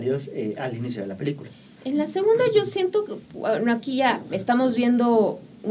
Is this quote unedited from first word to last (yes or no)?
yes